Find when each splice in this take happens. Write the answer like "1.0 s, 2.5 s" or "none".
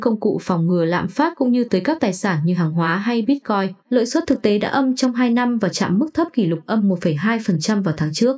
3.8 s